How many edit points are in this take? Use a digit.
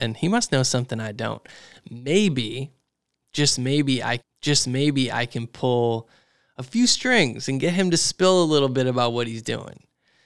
1